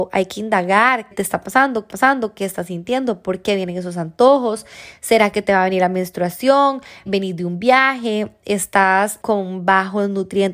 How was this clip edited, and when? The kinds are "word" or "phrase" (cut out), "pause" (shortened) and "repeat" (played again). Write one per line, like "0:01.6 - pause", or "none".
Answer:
0:01.1 - word
0:01.9 - repeat
0:07.1 - word
0:09.2 - word